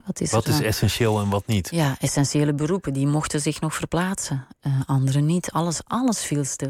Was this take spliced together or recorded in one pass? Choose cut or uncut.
uncut